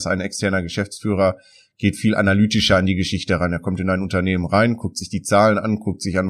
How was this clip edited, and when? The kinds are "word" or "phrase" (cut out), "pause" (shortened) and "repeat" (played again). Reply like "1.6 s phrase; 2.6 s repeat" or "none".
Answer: none